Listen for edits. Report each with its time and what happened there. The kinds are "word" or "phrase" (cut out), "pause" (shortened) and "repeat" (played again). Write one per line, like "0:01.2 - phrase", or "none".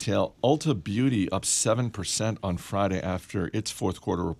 none